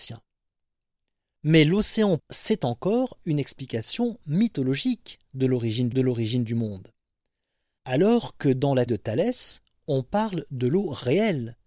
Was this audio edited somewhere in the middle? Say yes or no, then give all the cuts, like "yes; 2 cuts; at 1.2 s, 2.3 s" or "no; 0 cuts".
yes; 3 cuts; at 2.2 s, 5.9 s, 8.9 s